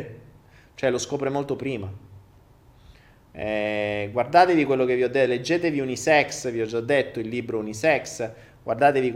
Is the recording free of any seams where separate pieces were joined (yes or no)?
yes